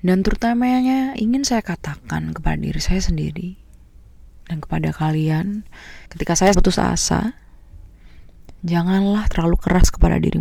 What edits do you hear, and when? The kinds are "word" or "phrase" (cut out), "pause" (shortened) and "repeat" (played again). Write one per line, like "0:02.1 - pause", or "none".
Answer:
0:01.1 - word
0:06.1 - pause
0:06.5 - word
0:08.6 - pause